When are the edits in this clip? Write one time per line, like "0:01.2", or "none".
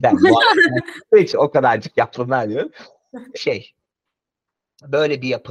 0:01.3
0:03.4